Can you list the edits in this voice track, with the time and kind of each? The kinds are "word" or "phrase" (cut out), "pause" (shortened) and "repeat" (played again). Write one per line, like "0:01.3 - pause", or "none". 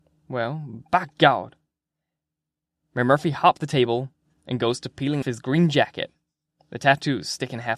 0:03.6 - word
0:05.2 - word